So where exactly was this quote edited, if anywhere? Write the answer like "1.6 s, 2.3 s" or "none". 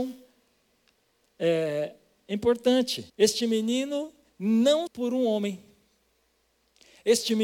3.1 s, 4.9 s